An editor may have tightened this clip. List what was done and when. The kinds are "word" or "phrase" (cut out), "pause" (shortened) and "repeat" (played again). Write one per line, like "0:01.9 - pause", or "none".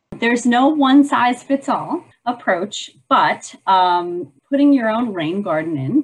0:02.1 - pause
0:04.4 - pause